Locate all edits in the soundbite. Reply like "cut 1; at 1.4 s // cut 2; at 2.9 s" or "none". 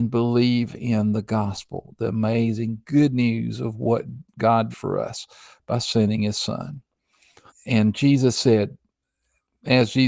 cut 1; at 4.7 s // cut 2; at 7.5 s